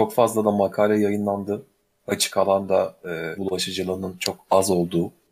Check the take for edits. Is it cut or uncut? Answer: cut